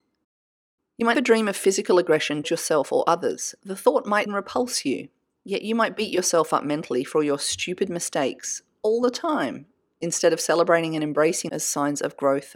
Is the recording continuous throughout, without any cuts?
no; 4 cuts; at 1.1 s, 2.4 s, 4.3 s, 11.5 s

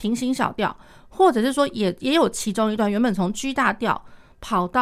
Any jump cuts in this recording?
no; 0 cuts

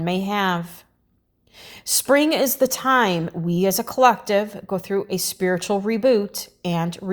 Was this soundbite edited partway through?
no; 0 cuts

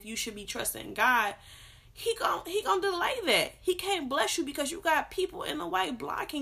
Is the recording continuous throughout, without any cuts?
yes; 0 cuts

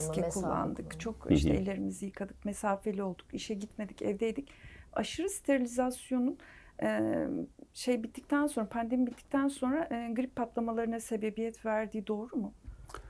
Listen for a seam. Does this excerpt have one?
no; 0 cuts

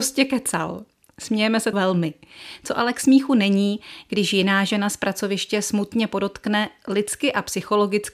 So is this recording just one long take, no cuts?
no; 1 cut; at 1.7 s

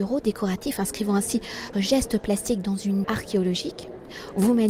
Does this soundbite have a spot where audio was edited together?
yes; 2 cuts; at 1.7 s, 3.0 s

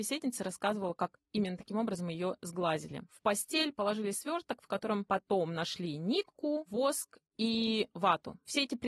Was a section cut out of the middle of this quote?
no; 0 cuts

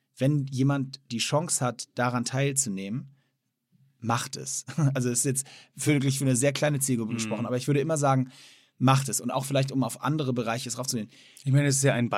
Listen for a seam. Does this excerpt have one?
no; 0 cuts

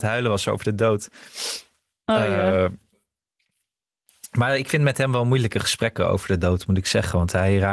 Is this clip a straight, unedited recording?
yes; 0 cuts

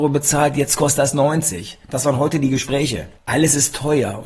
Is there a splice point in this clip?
yes; 1 cut; at 3.2 s

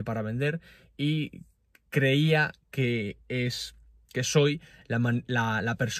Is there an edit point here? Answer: no; 0 cuts

